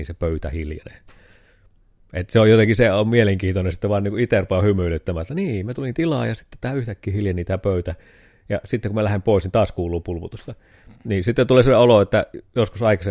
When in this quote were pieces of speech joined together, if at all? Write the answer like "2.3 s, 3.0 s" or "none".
none